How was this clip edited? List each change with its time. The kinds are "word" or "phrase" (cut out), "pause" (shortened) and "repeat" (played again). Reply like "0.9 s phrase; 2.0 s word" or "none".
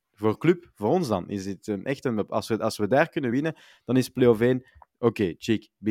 none